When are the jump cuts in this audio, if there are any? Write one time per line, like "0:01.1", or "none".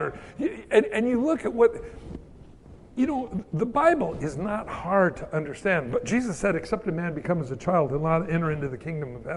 none